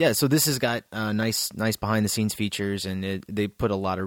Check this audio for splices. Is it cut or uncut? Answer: uncut